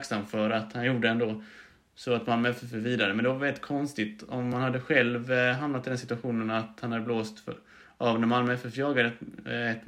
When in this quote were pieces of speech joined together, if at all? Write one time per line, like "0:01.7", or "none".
none